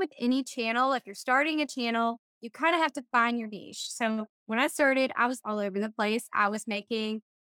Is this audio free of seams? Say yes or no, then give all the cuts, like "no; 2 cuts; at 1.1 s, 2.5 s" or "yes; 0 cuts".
yes; 0 cuts